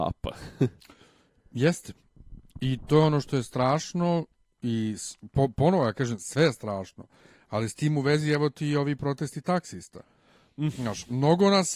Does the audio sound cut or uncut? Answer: uncut